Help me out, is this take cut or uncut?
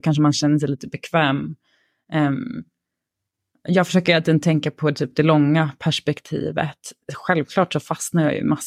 uncut